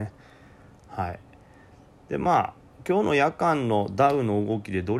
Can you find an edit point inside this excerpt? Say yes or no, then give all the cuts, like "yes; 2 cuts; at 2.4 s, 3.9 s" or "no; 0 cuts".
no; 0 cuts